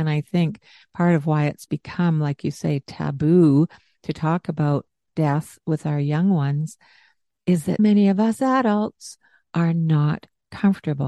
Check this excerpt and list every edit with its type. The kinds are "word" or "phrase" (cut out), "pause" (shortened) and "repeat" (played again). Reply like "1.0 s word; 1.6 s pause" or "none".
7.8 s word